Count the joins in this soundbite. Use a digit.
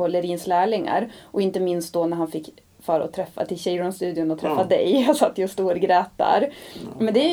0